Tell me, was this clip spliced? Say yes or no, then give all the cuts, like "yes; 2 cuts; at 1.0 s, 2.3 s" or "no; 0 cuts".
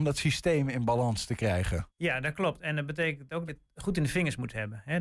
yes; 2 cuts; at 1.9 s, 3.5 s